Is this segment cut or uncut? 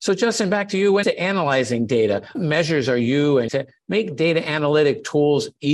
cut